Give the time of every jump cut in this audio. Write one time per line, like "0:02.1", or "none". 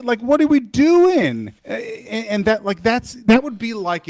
0:01.6